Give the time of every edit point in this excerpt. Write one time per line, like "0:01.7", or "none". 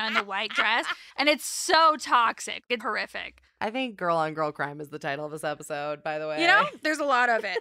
0:01.1
0:02.8